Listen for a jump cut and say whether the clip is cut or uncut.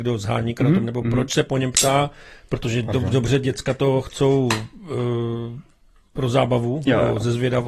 uncut